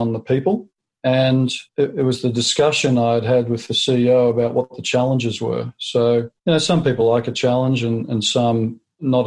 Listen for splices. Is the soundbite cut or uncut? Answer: cut